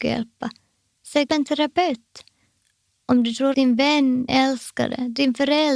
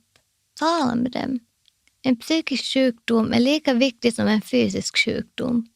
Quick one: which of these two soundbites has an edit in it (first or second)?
first